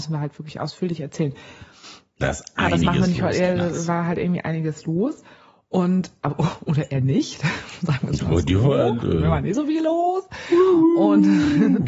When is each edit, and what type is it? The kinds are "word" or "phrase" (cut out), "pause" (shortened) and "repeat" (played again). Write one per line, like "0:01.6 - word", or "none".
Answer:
none

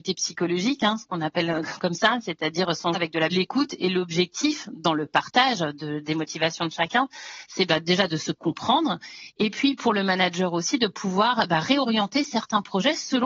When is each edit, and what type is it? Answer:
0:02.9 - word
0:03.3 - phrase

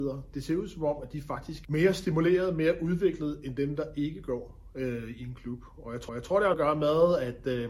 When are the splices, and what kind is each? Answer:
0:01.6 - word
0:06.1 - repeat
0:06.5 - word

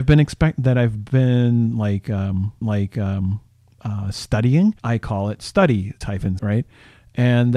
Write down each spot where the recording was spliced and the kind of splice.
0:02.6 - repeat
0:04.8 - pause
0:06.0 - word
0:06.4 - word

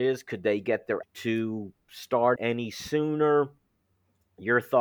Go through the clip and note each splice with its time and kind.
0:01.0 - phrase
0:02.4 - word

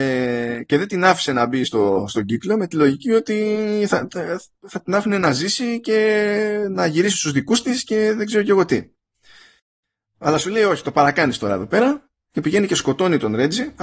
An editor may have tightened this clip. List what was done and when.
none

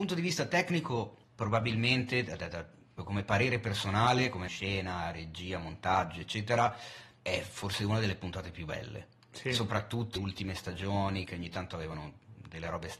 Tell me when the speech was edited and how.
0:01.2 - pause
0:03.0 - word
0:04.5 - phrase
0:07.2 - word
0:10.2 - word

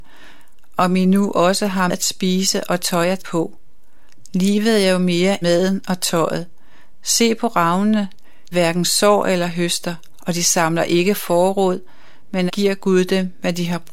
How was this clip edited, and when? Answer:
0:01.9 - word
0:03.2 - word
0:05.4 - word
0:08.5 - word
0:12.5 - word

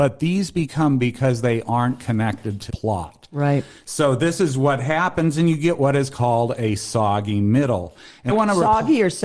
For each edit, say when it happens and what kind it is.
0:01.0 - word
0:02.7 - word
0:08.3 - word

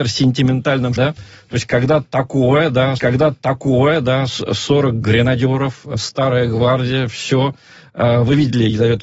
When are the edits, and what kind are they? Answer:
0:01.0 - word
0:03.0 - repeat

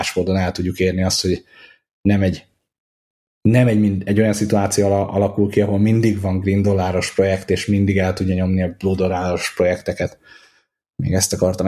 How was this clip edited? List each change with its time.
none

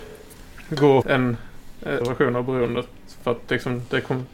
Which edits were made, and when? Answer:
0:01.0 - word
0:02.0 - phrase

